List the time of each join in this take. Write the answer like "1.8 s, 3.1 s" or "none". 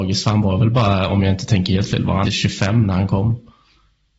2.2 s

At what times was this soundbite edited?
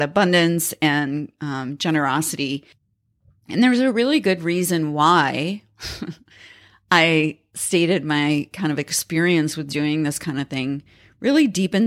none

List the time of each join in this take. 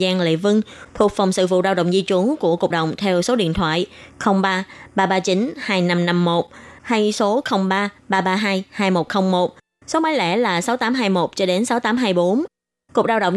2.7 s

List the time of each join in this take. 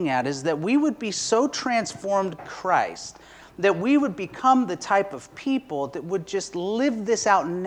2.4 s

